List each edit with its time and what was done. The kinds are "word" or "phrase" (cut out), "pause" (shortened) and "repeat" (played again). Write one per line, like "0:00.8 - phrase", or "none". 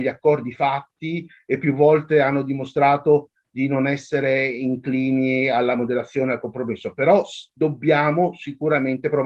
none